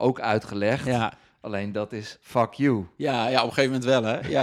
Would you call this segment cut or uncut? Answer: uncut